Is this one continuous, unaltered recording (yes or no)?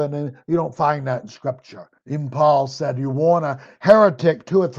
no